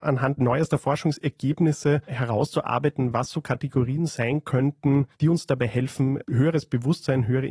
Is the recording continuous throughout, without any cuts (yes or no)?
no